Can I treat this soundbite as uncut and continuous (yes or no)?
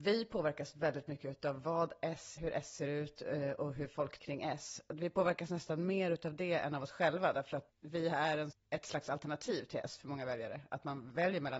no